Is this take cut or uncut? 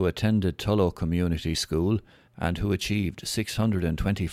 uncut